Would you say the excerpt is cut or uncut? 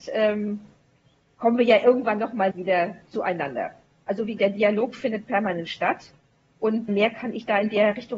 cut